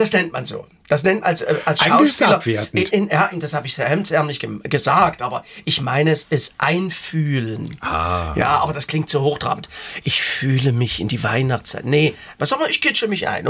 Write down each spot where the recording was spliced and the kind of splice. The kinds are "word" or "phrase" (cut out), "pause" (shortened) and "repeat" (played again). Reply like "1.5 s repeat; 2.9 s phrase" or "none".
1.2 s word; 2.9 s word; 3.3 s word